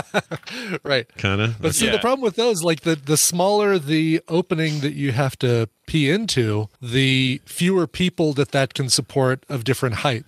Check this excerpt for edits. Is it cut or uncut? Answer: cut